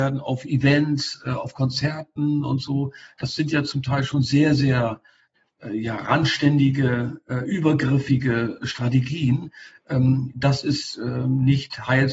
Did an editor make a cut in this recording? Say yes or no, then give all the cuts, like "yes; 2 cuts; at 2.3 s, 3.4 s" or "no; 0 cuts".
no; 0 cuts